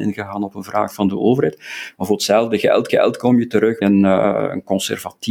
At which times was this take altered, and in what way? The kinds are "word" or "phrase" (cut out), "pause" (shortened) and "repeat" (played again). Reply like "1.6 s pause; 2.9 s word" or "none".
2.9 s repeat; 3.8 s word